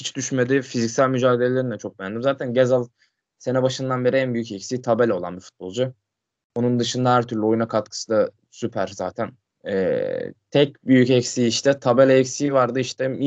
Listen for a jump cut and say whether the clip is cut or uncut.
uncut